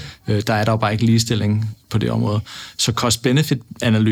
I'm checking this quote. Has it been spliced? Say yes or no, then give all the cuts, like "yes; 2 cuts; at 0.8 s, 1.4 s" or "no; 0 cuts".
no; 0 cuts